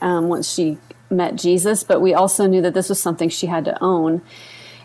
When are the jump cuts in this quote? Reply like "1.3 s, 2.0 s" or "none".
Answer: none